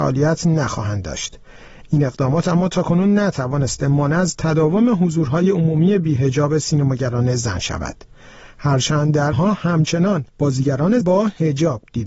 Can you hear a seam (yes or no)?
yes